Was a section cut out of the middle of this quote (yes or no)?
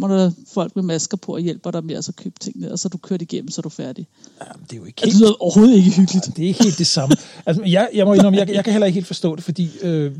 no